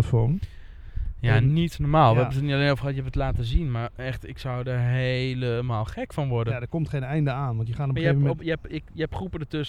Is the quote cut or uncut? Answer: uncut